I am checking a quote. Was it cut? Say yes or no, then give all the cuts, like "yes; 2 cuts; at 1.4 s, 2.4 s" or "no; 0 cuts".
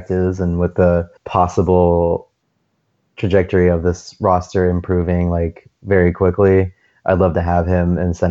yes; 1 cut; at 1.2 s